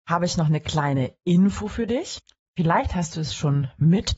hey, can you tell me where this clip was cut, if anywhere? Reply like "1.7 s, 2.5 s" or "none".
none